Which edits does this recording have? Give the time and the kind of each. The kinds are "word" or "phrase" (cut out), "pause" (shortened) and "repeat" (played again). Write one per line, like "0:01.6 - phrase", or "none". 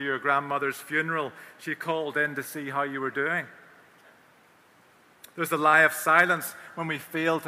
none